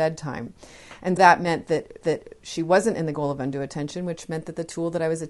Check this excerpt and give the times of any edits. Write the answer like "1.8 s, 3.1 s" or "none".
1.2 s, 2.0 s